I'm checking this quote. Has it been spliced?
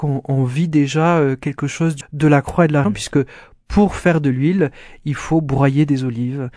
yes; 2 cuts; at 2.0 s, 2.8 s

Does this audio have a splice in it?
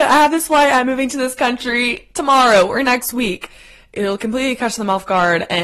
no; 0 cuts

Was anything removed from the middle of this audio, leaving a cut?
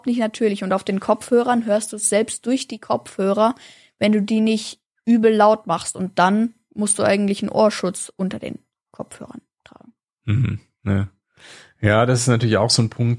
no; 0 cuts

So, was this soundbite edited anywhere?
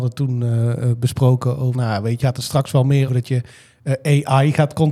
yes; 3 cuts; at 1.7 s, 2.2 s, 3.1 s

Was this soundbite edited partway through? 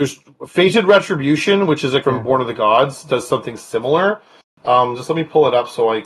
yes; 1 cut; at 2.0 s

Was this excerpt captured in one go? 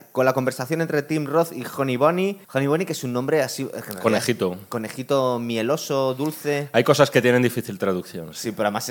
no; 1 cut; at 2.4 s

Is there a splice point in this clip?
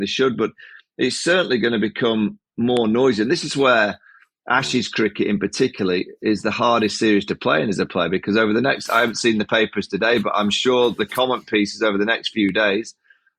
no; 0 cuts

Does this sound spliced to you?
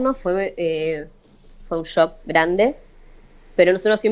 no; 0 cuts

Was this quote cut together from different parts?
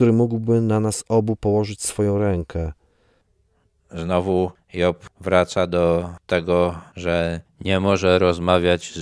no; 0 cuts

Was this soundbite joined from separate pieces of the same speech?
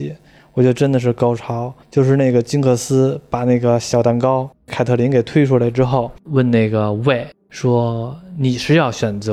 yes; 1 cut; at 1.8 s

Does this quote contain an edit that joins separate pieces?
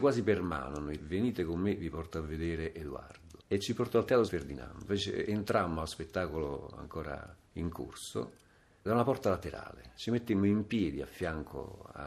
yes; 6 cuts; at 1.0 s, 3.4 s, 4.3 s, 4.9 s, 7.4 s, 8.9 s

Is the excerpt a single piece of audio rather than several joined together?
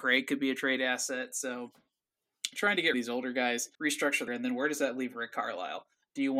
no; 3 cuts; at 2.9 s, 3.7 s, 4.3 s

